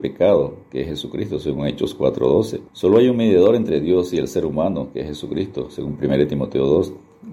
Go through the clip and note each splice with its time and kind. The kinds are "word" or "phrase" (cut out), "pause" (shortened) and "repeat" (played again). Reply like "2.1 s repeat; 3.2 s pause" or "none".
2.7 s pause